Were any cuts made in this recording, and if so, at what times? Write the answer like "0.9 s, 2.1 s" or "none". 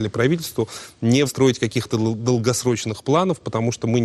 1.3 s